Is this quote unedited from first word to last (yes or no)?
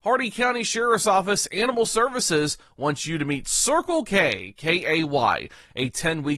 yes